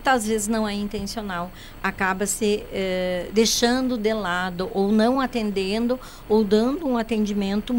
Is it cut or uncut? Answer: uncut